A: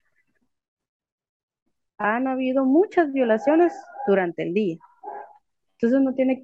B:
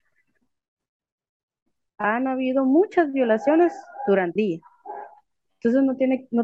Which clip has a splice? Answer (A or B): B